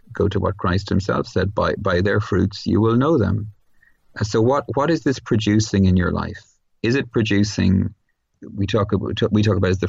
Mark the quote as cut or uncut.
uncut